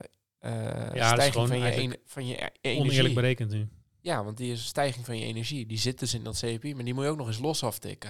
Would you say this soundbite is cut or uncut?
uncut